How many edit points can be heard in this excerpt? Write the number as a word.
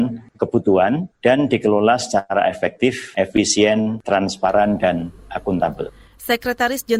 zero